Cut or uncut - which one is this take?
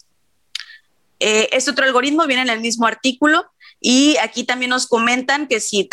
uncut